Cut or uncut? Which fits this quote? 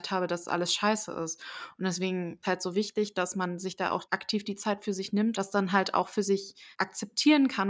cut